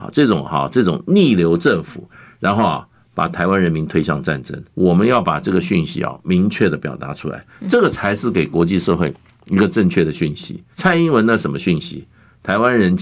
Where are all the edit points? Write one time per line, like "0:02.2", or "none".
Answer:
0:04.7
0:10.7